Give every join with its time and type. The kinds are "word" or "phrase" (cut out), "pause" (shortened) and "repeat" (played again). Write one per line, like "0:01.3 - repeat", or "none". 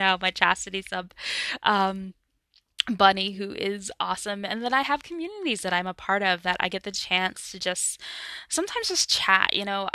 none